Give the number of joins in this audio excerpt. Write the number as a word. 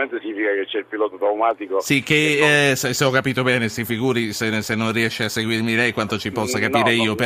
zero